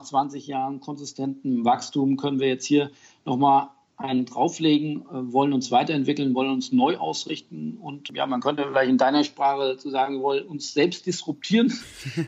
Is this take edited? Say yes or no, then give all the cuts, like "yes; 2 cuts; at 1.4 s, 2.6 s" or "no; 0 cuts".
no; 0 cuts